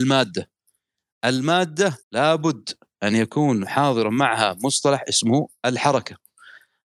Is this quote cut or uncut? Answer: cut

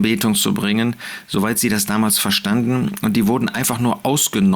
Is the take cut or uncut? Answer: uncut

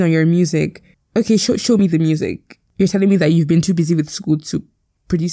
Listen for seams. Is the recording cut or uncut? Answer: cut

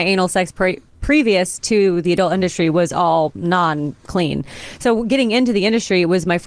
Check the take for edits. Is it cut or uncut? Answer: uncut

